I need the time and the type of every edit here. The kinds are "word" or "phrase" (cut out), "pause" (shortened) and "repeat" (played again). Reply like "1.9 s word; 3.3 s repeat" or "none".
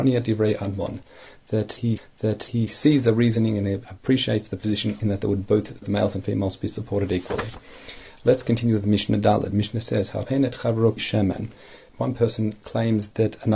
2.0 s repeat; 5.0 s phrase; 10.2 s word; 11.0 s word